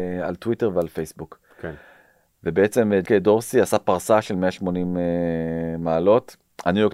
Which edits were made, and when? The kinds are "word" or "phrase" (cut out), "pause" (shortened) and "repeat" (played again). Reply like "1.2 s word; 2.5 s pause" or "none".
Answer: 3.1 s word

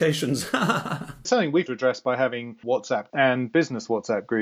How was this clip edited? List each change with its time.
1.3 s word; 1.7 s word; 2.6 s word; 3.1 s word

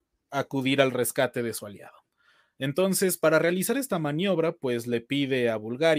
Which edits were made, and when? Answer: none

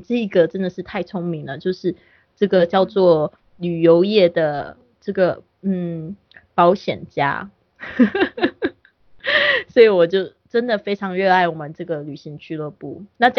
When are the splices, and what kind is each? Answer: none

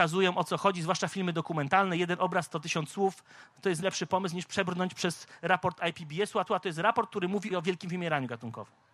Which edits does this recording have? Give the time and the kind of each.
3.8 s word; 6.5 s repeat; 7.5 s phrase

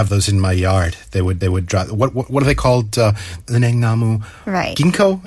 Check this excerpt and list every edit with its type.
1.4 s repeat; 3.4 s word

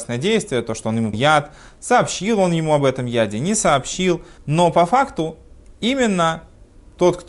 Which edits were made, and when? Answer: 1.1 s word; 4.4 s pause

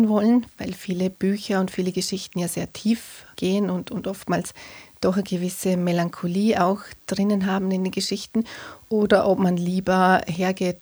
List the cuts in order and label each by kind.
3.3 s pause

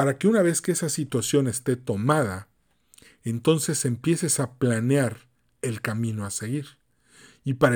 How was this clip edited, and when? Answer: none

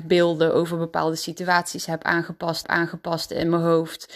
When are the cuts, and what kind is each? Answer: 2.6 s repeat

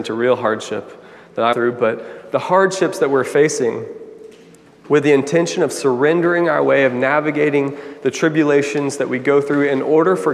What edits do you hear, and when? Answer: 1.5 s word

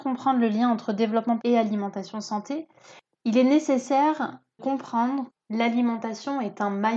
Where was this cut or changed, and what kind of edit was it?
1.4 s word; 4.6 s word; 5.3 s word

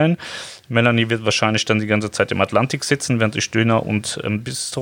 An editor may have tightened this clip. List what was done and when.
none

